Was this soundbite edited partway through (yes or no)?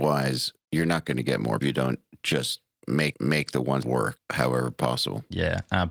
yes